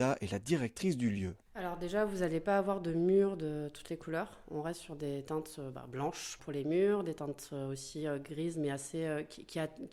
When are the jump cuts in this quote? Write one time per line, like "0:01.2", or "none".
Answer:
0:06.4